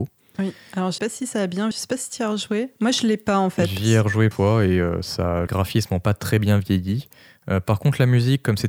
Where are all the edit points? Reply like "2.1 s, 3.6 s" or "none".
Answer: 1.0 s, 1.7 s, 4.3 s, 5.5 s